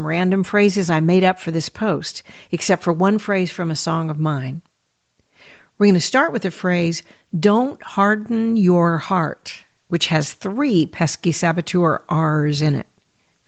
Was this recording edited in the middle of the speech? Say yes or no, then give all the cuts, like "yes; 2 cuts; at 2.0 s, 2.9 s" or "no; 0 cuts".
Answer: no; 0 cuts